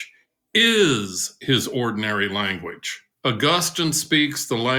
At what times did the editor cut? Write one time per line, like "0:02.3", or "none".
0:03.1